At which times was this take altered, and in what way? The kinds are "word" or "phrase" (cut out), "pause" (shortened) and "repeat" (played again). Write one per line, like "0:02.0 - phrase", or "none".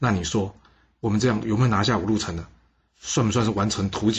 none